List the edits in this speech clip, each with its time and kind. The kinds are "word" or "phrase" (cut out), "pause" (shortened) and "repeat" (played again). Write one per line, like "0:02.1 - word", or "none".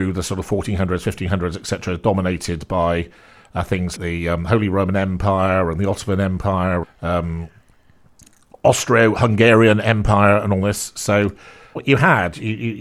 0:04.0 - word
0:06.8 - word
0:11.8 - word